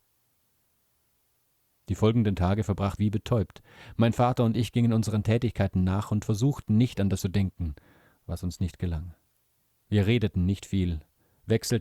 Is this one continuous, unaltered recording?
no; 2 cuts; at 3.0 s, 7.2 s

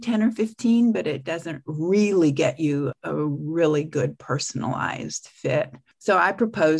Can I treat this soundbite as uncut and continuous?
yes; 0 cuts

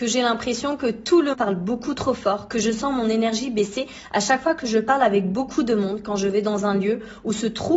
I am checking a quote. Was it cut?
yes; 1 cut; at 1.3 s

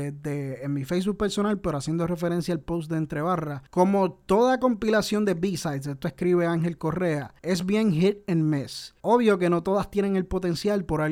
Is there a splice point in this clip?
yes; 3 cuts; at 3.7 s, 7.4 s, 9.0 s

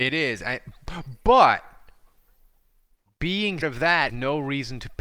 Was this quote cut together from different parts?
yes; 2 cuts; at 3.6 s, 4.1 s

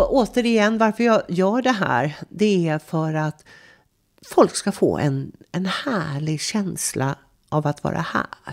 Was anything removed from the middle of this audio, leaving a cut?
no; 0 cuts

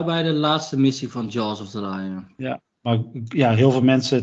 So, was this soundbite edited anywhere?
no; 0 cuts

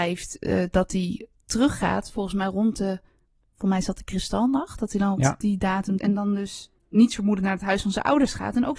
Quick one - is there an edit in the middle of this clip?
yes; 2 cuts; at 5.2 s, 6.0 s

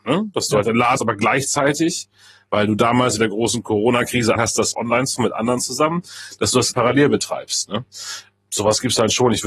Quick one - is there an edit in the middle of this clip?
yes; 6 cuts; at 1.0 s, 3.2 s, 4.4 s, 4.7 s, 5.2 s, 6.7 s

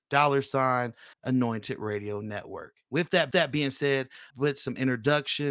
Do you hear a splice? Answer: yes; 3 cuts; at 1.1 s, 3.3 s, 4.3 s

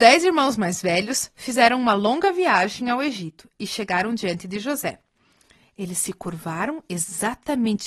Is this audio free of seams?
yes; 0 cuts

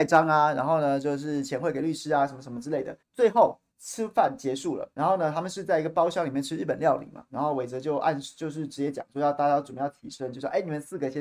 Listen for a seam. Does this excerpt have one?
yes; 3 cuts; at 3.0 s, 3.7 s, 4.9 s

